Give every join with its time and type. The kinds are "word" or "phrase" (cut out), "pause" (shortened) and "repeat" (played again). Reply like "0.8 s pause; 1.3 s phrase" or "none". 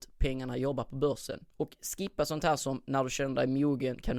1.5 s pause